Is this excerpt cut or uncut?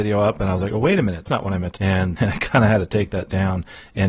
cut